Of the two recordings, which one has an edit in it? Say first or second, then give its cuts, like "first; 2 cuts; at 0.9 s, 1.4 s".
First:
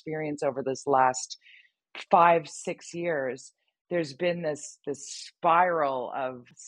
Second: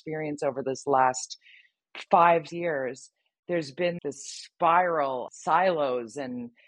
second; 3 cuts; at 2.5 s, 4.0 s, 5.3 s